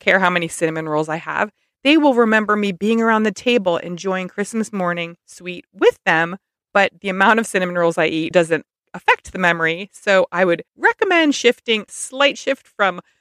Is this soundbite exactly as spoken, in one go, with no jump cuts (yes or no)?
no